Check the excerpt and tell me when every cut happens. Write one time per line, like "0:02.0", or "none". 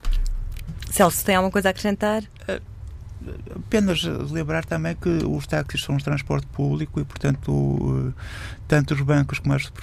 none